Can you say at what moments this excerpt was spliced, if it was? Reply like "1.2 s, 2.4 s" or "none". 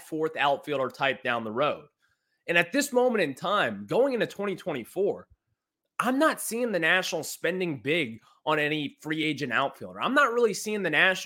none